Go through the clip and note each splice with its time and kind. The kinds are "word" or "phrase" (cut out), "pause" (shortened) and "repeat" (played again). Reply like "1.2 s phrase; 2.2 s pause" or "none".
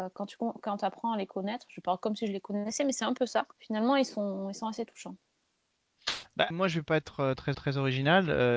3.5 s pause; 6.5 s word; 7.5 s repeat